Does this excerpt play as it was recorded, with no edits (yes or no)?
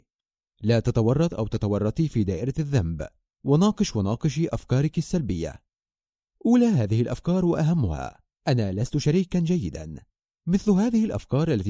yes